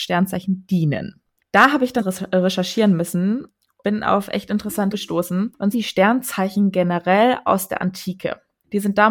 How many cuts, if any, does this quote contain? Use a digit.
5